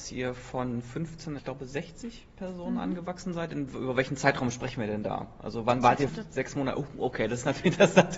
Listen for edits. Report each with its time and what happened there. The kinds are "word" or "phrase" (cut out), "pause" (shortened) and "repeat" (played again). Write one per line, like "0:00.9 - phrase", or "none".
0:01.4 - word
0:06.1 - phrase